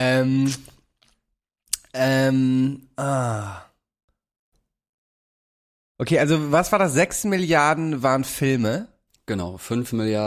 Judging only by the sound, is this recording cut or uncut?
uncut